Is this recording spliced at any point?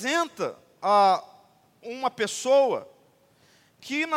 no; 0 cuts

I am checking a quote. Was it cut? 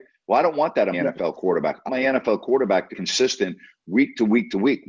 yes; 3 cuts; at 0.9 s, 1.9 s, 2.9 s

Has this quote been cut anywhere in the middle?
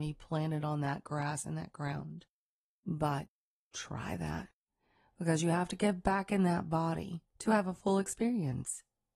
no; 0 cuts

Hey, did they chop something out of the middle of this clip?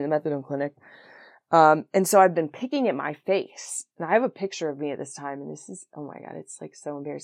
yes; 1 cut; at 3.9 s

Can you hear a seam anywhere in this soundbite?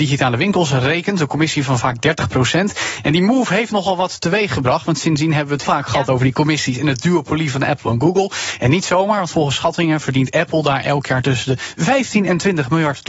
yes; 1 cut; at 5.6 s

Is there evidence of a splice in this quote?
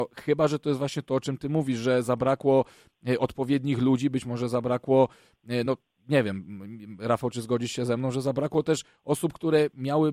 no; 0 cuts

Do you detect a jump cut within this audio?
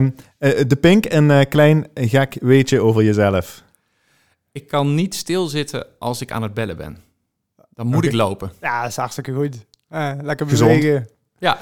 no; 0 cuts

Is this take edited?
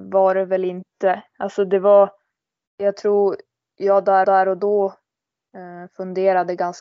yes; 1 cut; at 4.2 s

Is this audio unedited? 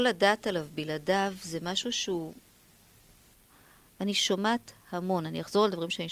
yes; 0 cuts

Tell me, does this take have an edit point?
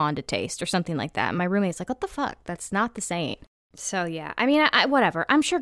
no; 0 cuts

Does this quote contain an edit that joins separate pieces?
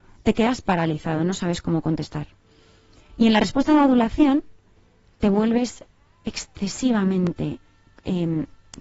no; 0 cuts

